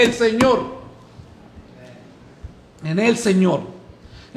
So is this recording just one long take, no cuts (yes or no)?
yes